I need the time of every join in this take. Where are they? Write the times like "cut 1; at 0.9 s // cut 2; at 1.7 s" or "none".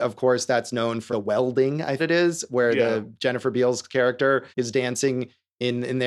cut 1; at 1.1 s // cut 2; at 2.0 s // cut 3; at 4.5 s